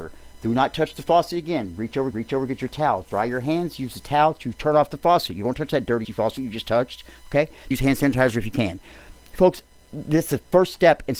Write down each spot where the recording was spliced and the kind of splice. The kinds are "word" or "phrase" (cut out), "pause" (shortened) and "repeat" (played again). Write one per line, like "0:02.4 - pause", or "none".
0:02.1 - repeat
0:06.0 - word
0:07.7 - word